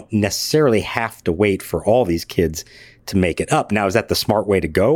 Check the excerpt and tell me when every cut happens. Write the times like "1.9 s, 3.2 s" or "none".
none

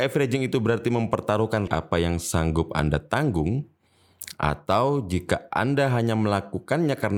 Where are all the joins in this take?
1.7 s

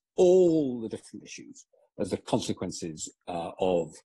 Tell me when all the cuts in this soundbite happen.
1.2 s

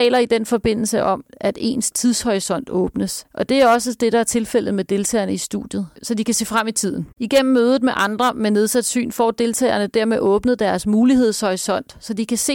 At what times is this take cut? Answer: 7.1 s

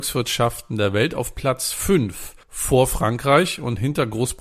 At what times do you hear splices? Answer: 2.4 s

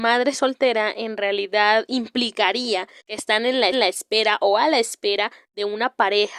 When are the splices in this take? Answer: 3.0 s, 3.7 s

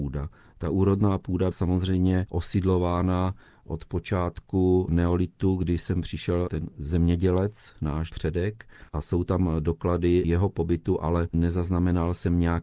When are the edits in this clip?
1.5 s, 8.1 s, 8.9 s

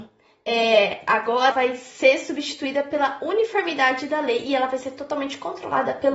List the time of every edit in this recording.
1.5 s

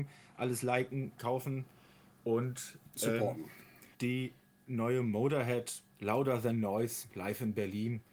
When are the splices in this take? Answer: 3.9 s, 5.9 s

